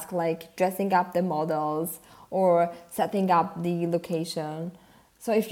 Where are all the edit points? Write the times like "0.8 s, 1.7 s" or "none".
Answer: none